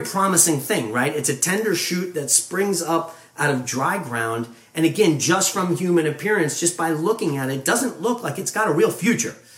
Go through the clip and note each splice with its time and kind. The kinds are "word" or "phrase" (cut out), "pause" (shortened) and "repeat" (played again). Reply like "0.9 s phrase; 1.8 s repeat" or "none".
none